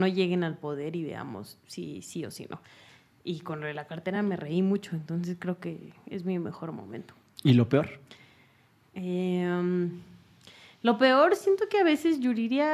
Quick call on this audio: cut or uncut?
uncut